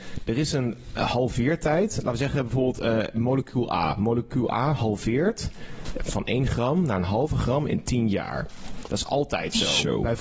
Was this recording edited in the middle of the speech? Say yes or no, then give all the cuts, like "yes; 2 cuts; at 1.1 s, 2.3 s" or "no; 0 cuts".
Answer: no; 0 cuts